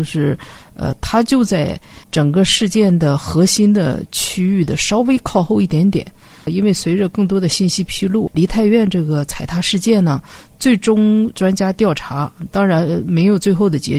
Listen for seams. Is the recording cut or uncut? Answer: cut